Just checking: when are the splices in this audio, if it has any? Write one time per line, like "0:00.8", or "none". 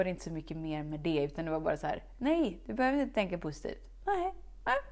none